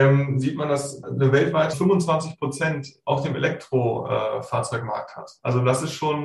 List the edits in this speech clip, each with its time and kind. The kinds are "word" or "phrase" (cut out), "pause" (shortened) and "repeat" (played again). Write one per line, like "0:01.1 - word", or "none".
0:01.0 - word
0:01.7 - phrase